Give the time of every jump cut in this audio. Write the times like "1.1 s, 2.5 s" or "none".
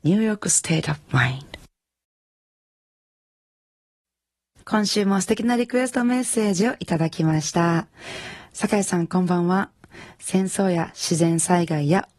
none